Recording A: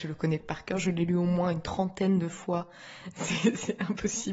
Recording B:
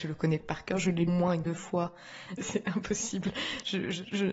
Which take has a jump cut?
B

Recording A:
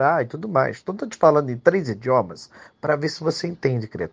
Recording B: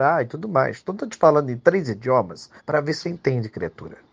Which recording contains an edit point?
B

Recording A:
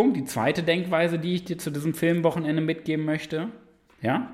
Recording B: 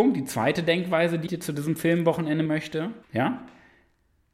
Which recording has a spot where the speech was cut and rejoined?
B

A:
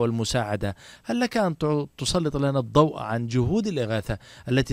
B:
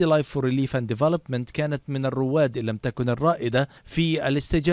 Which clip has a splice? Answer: B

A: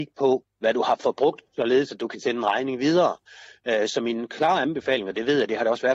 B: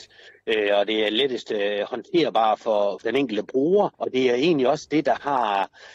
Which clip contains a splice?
B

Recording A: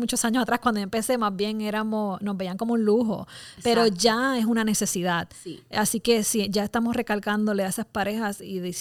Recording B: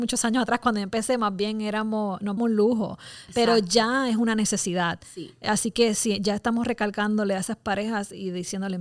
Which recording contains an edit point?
B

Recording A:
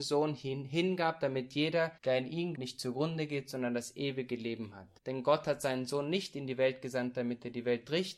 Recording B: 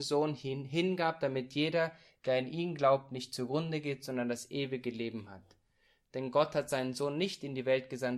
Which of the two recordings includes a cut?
A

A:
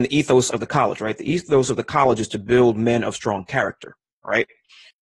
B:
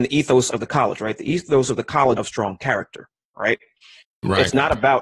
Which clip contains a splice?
B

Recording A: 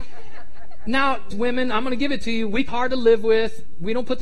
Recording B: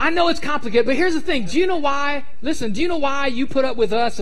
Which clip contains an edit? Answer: A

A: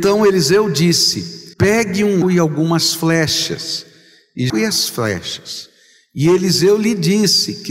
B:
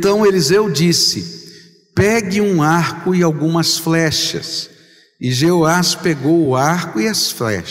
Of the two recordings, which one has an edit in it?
A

